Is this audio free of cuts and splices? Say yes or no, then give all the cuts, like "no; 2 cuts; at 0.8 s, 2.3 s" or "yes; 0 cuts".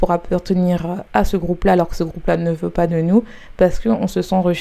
yes; 0 cuts